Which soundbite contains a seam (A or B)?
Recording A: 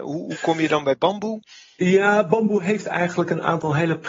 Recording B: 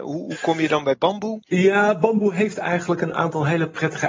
B